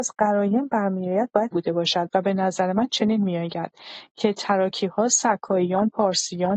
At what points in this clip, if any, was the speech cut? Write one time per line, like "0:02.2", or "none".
0:01.5